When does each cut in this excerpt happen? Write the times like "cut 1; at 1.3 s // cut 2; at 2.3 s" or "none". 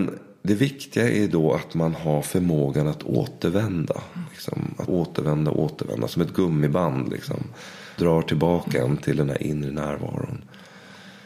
cut 1; at 4.9 s // cut 2; at 8.0 s

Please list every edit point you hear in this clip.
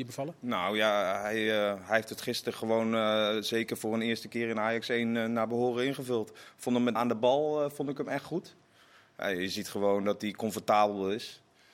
cut 1; at 7.0 s

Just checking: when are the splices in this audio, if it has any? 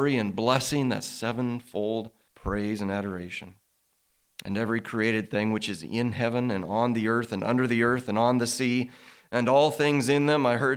cut 1; at 2.3 s

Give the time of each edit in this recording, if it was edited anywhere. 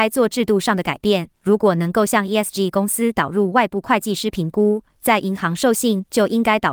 cut 1; at 1.4 s

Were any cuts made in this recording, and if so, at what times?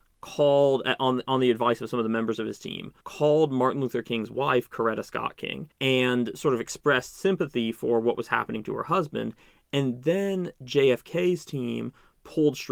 cut 1; at 3.0 s // cut 2; at 5.7 s

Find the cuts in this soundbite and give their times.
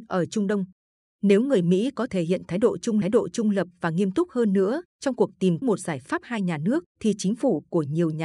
cut 1; at 2.1 s // cut 2; at 3.0 s // cut 3; at 4.9 s // cut 4; at 5.6 s // cut 5; at 6.9 s

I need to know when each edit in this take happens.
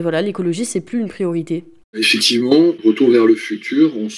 none

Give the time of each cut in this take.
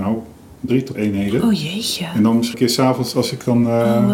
cut 1; at 0.9 s // cut 2; at 2.5 s

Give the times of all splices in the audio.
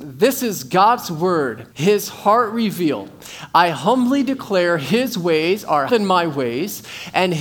cut 1; at 1.7 s // cut 2; at 5.9 s

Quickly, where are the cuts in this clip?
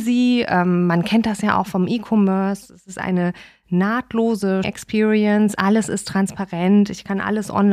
cut 1; at 4.6 s

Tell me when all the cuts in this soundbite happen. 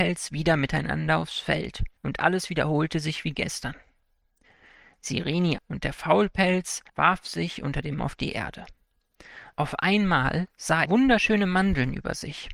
cut 1; at 2.0 s // cut 2; at 5.6 s // cut 3; at 6.9 s // cut 4; at 8.0 s // cut 5; at 10.9 s

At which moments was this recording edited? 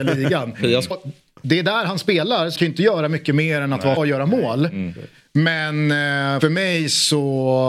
cut 1; at 0.9 s // cut 2; at 2.6 s // cut 3; at 4.0 s // cut 4; at 6.4 s

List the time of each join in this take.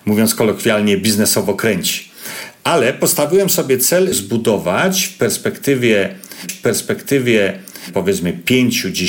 cut 1; at 4.1 s // cut 2; at 6.5 s

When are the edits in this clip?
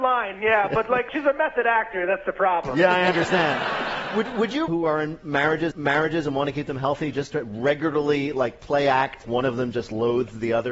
cut 1; at 4.7 s // cut 2; at 5.7 s // cut 3; at 9.2 s

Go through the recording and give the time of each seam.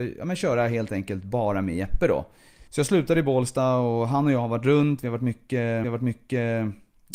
cut 1; at 2.7 s // cut 2; at 5.8 s

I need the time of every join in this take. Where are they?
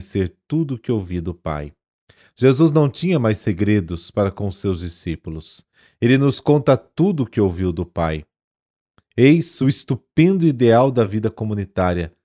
none

